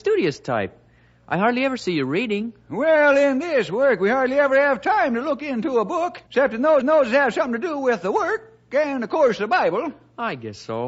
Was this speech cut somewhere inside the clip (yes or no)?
yes